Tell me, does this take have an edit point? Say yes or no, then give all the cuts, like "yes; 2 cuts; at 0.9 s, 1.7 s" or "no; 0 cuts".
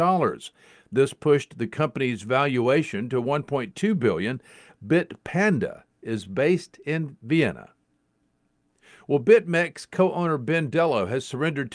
no; 0 cuts